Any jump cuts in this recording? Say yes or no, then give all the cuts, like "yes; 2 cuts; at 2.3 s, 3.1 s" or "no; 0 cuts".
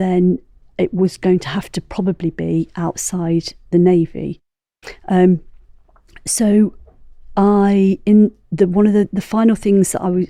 no; 0 cuts